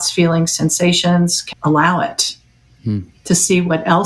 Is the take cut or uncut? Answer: cut